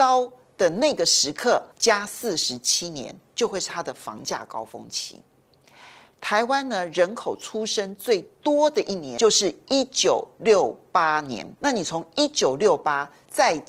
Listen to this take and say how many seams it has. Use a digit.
2